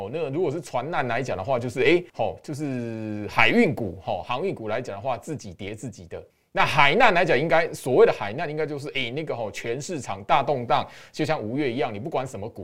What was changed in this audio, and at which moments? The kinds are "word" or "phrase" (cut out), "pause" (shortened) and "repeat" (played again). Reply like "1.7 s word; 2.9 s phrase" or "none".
2.1 s pause; 6.3 s pause